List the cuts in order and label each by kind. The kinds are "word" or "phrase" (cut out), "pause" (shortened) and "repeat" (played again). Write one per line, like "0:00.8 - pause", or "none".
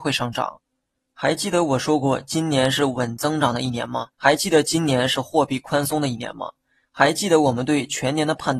0:04.1 - pause